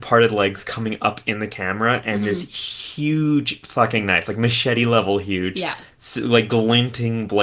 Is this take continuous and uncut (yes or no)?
yes